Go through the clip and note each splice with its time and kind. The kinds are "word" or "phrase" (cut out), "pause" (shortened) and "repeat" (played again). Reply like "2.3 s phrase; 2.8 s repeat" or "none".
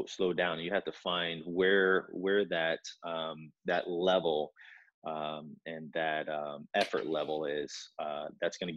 5.6 s word